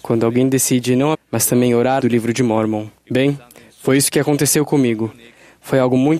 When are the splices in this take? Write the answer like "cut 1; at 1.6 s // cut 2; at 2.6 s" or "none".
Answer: cut 1; at 1.1 s // cut 2; at 2.0 s // cut 3; at 3.0 s

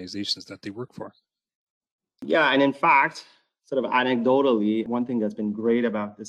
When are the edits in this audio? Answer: none

